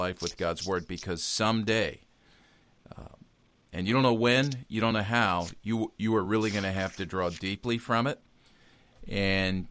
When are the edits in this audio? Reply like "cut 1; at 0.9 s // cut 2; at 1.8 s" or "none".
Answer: none

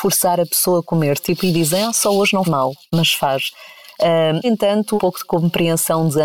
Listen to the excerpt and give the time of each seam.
cut 1; at 2.4 s // cut 2; at 4.4 s // cut 3; at 5.0 s

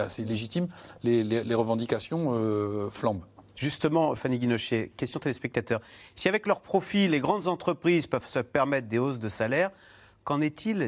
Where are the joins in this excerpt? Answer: none

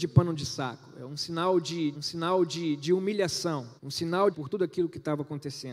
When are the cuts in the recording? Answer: cut 1; at 1.9 s // cut 2; at 3.8 s // cut 3; at 4.3 s

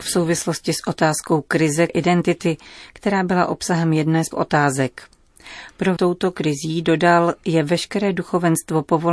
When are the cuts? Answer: cut 1; at 1.9 s // cut 2; at 4.3 s // cut 3; at 6.0 s

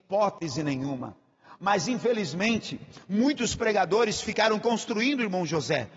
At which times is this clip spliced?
none

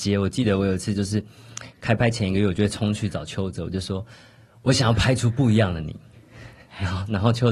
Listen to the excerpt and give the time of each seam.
cut 1; at 4.1 s

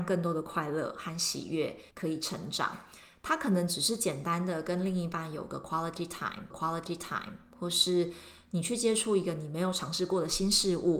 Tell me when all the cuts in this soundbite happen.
cut 1; at 1.9 s // cut 2; at 6.5 s

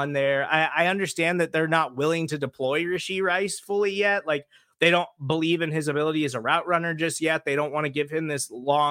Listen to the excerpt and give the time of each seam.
none

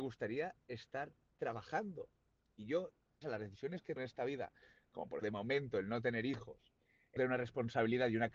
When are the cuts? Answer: cut 1; at 3.2 s // cut 2; at 4.0 s // cut 3; at 5.2 s // cut 4; at 7.2 s

